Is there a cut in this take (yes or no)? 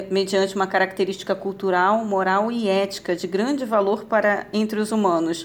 no